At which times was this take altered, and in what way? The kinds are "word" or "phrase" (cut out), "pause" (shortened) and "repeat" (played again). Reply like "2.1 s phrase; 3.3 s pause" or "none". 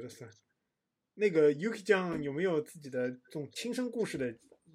none